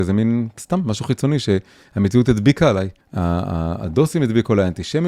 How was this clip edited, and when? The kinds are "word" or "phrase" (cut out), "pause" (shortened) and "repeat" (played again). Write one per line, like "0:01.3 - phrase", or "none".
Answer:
0:03.0 - pause